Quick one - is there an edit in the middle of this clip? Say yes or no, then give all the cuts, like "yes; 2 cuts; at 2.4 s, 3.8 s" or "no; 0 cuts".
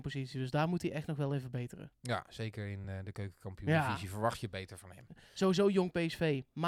no; 0 cuts